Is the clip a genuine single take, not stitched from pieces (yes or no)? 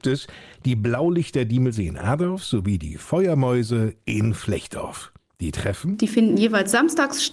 yes